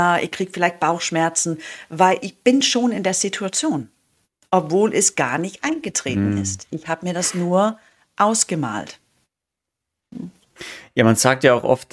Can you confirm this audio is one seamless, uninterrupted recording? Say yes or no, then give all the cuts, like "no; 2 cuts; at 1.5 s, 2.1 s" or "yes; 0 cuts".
yes; 0 cuts